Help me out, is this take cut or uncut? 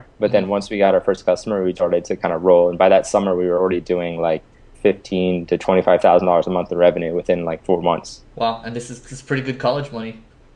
cut